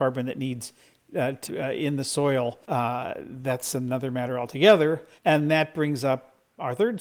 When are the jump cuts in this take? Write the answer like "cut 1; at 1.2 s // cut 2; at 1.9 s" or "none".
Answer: cut 1; at 1.5 s // cut 2; at 2.6 s // cut 3; at 5.2 s